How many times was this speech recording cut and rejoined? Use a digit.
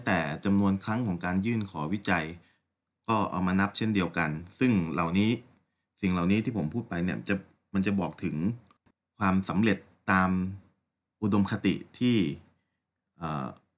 0